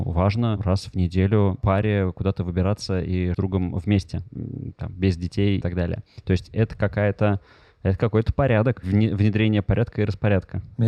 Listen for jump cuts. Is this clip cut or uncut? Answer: cut